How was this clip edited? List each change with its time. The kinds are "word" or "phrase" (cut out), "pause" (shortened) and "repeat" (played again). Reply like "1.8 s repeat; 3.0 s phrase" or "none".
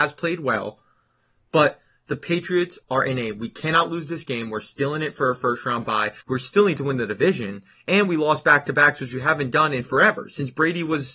2.8 s pause; 6.2 s pause